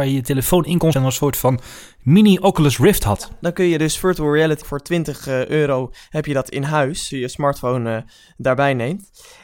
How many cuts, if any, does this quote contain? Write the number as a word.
three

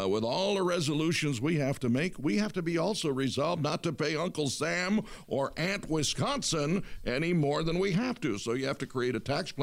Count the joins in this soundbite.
zero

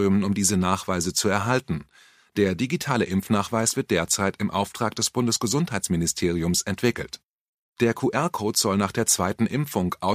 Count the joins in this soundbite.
zero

